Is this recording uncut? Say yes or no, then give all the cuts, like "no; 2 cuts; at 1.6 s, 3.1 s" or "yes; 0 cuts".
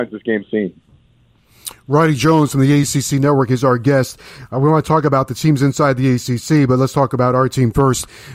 yes; 0 cuts